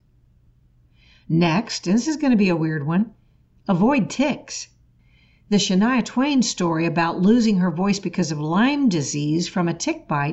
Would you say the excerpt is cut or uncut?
uncut